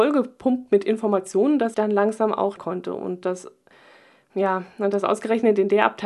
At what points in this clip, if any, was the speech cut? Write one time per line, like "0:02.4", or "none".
0:01.7
0:02.6